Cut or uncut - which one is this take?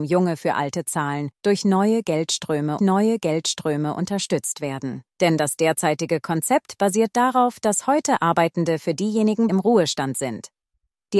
cut